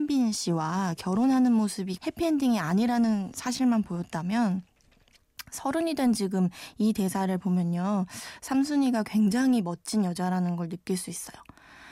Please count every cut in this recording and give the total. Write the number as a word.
one